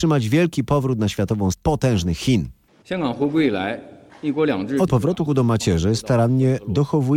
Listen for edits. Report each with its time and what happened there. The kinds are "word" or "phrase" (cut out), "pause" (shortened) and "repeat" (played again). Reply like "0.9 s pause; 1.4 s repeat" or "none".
1.5 s word; 4.9 s word; 5.3 s word